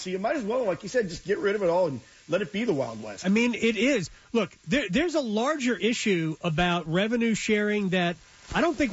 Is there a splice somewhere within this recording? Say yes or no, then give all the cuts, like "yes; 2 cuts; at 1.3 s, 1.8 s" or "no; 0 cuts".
no; 0 cuts